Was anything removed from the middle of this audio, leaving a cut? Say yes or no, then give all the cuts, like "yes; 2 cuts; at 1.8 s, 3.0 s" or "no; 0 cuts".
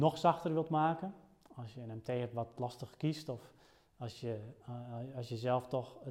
no; 0 cuts